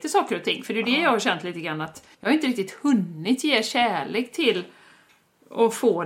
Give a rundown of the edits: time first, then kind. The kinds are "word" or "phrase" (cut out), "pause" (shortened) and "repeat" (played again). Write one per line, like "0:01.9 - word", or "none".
0:02.1 - pause